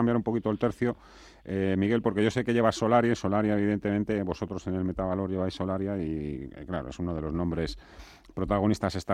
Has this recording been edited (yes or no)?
no